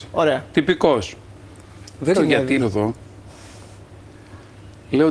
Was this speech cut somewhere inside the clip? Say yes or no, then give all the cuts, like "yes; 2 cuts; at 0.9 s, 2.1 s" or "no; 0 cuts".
yes; 2 cuts; at 2.1 s, 2.6 s